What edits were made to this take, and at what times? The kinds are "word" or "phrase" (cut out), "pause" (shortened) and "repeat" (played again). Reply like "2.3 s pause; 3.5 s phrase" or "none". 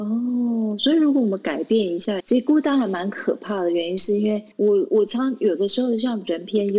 2.2 s phrase; 4.5 s pause